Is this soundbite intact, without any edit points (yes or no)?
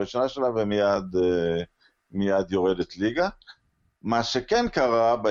yes